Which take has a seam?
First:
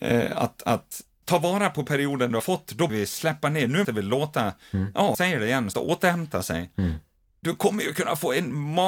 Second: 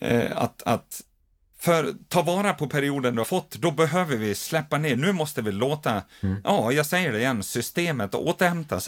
first; 5 cuts; at 1.2 s, 2.9 s, 3.8 s, 5.1 s, 5.7 s

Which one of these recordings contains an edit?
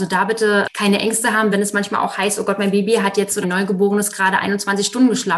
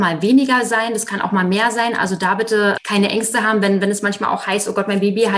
first; 2 cuts; at 1.5 s, 3.4 s

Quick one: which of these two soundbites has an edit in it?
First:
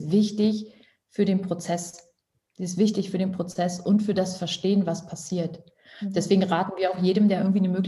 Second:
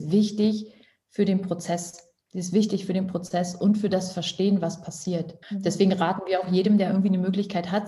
second; 2 cuts; at 2.3 s, 5.4 s

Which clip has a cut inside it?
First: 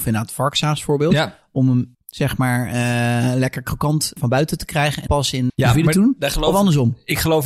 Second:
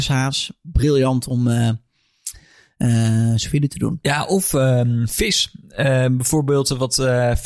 first; 4 cuts; at 1.9 s, 4.2 s, 5.1 s, 5.5 s

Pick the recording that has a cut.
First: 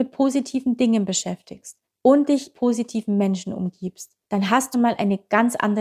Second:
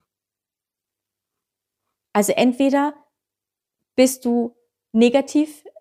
first; 4 cuts; at 1.9 s, 2.5 s, 4.2 s, 4.7 s

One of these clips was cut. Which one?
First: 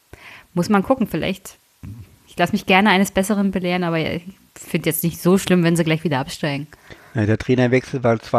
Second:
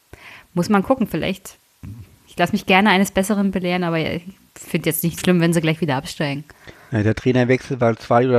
second; 1 cut; at 5.2 s

